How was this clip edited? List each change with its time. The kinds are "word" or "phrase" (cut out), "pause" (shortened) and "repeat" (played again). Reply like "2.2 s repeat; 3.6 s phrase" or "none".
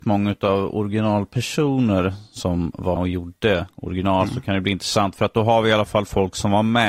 3.0 s word